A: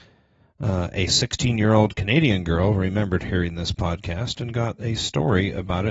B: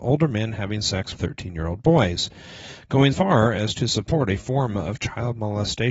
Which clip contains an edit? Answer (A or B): B